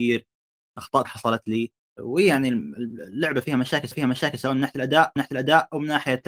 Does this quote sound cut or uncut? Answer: cut